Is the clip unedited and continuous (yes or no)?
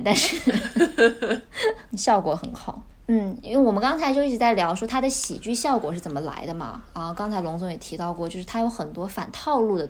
yes